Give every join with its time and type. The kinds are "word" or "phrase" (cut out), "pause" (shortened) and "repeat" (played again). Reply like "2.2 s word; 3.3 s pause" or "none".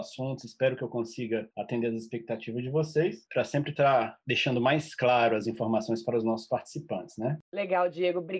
none